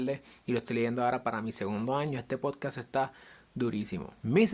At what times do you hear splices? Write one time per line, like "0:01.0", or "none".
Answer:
none